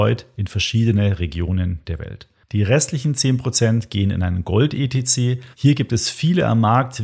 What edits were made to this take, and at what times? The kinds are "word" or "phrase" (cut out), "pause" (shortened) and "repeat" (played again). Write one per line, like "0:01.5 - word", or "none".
0:05.5 - pause